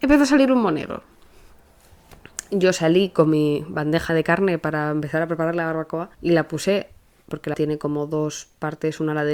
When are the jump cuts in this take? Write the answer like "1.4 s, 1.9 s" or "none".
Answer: 4.1 s, 6.1 s, 7.5 s